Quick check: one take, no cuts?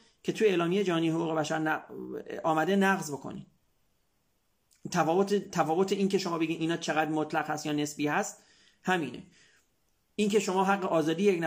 yes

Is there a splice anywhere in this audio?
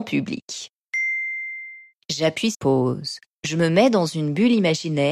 yes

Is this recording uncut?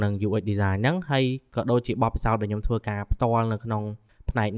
yes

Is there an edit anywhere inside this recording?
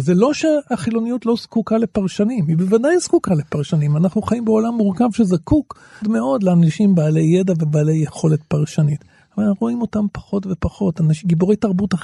yes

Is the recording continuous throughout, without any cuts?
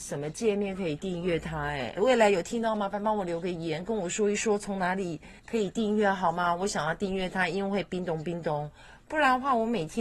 no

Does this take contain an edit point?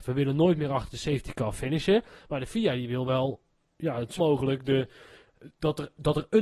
yes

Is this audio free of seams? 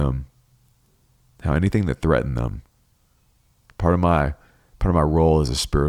yes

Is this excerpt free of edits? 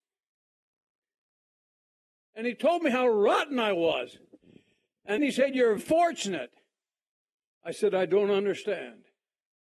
no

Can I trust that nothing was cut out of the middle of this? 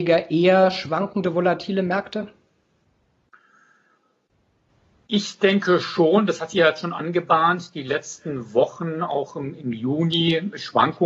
yes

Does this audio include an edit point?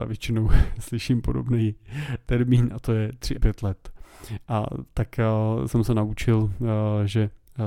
yes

